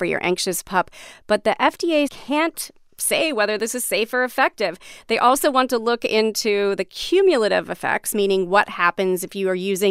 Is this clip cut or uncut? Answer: cut